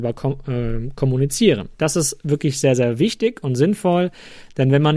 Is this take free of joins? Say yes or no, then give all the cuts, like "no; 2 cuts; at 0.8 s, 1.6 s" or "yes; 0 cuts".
no; 1 cut; at 1.7 s